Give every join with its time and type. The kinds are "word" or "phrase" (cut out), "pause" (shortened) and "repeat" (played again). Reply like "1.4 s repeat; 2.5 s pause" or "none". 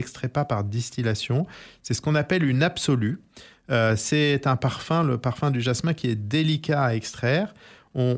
none